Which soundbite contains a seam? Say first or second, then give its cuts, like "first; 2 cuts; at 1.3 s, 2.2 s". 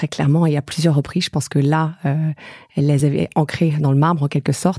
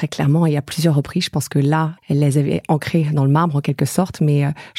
second; 1 cut; at 2.0 s